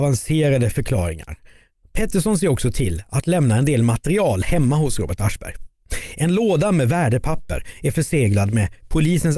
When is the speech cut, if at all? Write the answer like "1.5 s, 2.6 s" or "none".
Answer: none